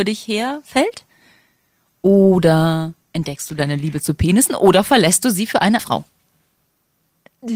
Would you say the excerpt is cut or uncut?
cut